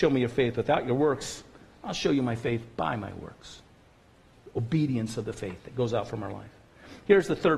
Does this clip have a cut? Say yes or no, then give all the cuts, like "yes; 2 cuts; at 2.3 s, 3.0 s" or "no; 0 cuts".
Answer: no; 0 cuts